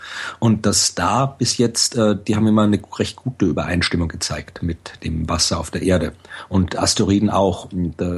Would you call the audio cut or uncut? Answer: uncut